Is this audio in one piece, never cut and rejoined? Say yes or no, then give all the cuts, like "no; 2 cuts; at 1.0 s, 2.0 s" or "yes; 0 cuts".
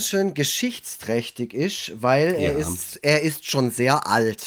yes; 0 cuts